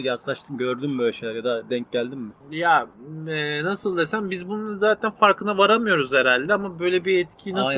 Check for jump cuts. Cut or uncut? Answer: cut